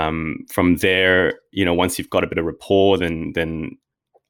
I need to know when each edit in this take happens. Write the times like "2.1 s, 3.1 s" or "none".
none

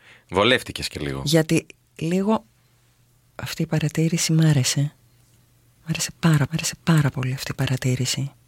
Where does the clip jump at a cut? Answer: 6.5 s

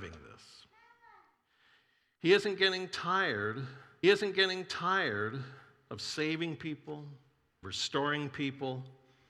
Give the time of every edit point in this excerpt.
4.0 s, 7.6 s

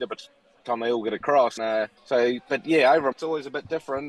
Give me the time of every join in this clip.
1.6 s, 2.0 s, 3.1 s

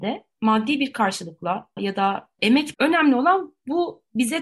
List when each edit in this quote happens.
1.8 s, 2.7 s

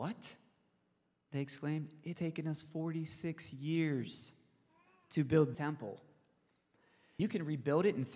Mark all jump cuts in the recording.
2.1 s, 5.5 s, 7.2 s

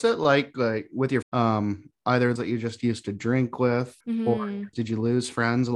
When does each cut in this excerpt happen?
1.2 s, 2.0 s, 2.4 s, 4.0 s, 4.7 s

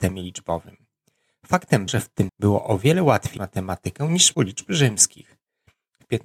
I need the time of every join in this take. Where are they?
1.9 s, 2.3 s, 3.4 s, 4.3 s

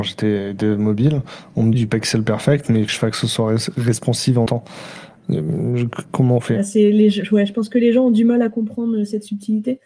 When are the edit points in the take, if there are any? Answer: 1.7 s, 2.9 s, 4.5 s

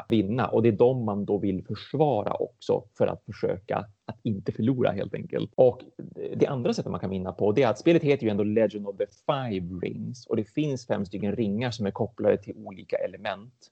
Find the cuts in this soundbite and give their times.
none

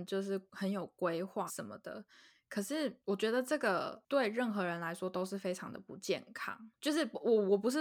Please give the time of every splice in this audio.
1.5 s

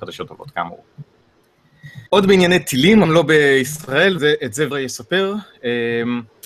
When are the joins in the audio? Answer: 2.1 s, 3.0 s, 4.2 s, 4.7 s

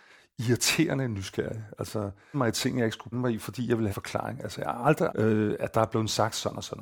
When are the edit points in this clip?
2.3 s, 3.1 s, 3.9 s, 5.1 s

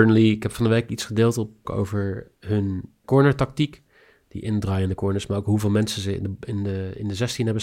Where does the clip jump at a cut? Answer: 1.6 s, 3.0 s

